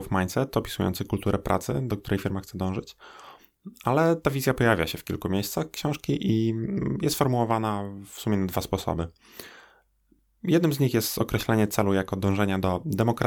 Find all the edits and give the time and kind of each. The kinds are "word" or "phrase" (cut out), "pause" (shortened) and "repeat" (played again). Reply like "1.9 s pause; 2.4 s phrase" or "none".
none